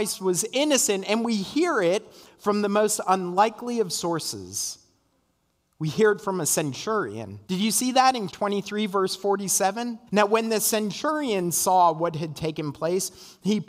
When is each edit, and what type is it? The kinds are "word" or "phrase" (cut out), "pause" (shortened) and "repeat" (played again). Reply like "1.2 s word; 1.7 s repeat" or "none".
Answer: 7.4 s pause; 8.3 s word; 10.1 s pause